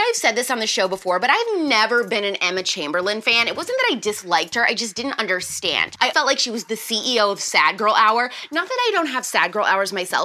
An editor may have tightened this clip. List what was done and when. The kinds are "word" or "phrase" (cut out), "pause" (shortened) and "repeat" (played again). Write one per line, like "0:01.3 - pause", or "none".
0:06.1 - word